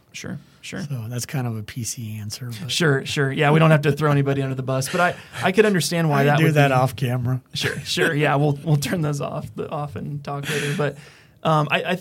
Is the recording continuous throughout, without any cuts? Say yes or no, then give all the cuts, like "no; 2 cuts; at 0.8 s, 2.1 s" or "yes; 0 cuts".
yes; 0 cuts